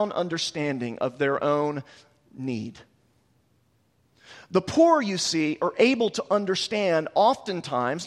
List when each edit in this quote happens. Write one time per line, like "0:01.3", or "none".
none